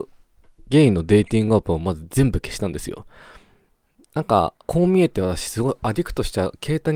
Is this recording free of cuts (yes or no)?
no